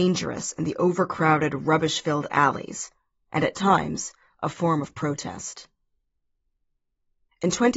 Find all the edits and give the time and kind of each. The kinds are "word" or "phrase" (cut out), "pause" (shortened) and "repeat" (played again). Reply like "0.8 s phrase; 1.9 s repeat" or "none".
none